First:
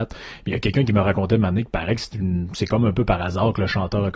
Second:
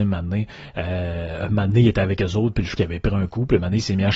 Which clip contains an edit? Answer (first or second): second